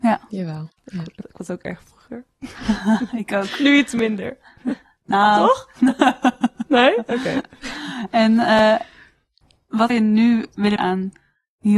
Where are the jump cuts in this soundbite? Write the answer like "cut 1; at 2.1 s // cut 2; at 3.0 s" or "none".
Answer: cut 1; at 1.2 s // cut 2; at 1.8 s // cut 3; at 9.9 s // cut 4; at 10.8 s